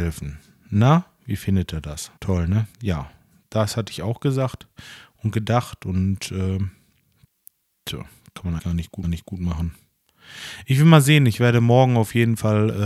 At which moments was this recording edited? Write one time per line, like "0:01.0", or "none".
0:02.2
0:02.7
0:08.6
0:09.0